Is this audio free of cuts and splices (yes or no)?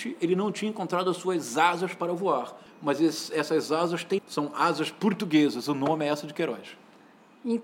no